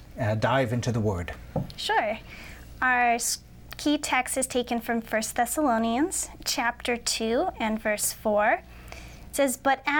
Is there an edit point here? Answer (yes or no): no